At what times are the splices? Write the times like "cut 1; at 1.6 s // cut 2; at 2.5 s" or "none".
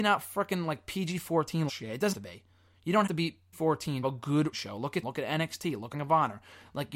cut 1; at 1.7 s // cut 2; at 2.1 s // cut 3; at 3.1 s // cut 4; at 3.5 s // cut 5; at 4.0 s // cut 6; at 4.5 s // cut 7; at 5.0 s // cut 8; at 5.9 s